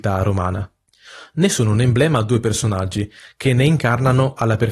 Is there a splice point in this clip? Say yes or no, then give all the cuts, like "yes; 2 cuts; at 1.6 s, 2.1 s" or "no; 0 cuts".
no; 0 cuts